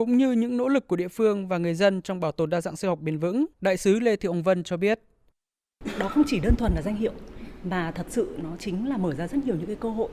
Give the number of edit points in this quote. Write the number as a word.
one